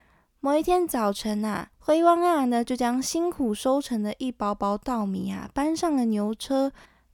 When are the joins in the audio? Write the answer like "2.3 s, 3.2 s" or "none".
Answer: 1.7 s